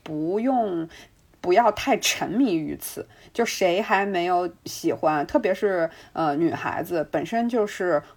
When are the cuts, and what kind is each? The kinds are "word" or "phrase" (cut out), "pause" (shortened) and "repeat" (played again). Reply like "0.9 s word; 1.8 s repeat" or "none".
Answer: none